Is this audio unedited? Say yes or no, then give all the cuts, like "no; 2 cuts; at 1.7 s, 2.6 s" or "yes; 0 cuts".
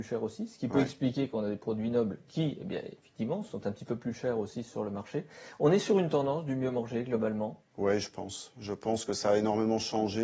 no; 1 cut; at 7.7 s